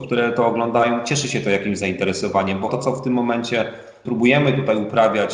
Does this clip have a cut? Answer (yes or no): yes